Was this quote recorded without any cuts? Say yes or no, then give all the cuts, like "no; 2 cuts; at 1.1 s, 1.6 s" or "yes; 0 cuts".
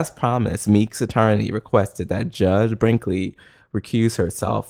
yes; 0 cuts